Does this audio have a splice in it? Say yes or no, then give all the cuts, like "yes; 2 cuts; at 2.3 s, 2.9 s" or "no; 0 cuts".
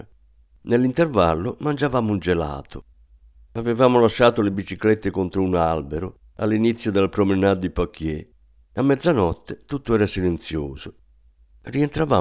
no; 0 cuts